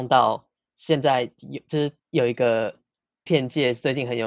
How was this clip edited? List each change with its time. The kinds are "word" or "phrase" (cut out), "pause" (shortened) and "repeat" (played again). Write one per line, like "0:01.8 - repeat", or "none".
0:02.0 - pause
0:03.3 - word